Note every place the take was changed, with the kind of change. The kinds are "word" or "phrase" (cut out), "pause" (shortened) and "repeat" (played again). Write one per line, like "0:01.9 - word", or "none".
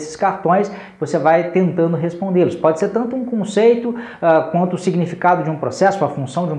none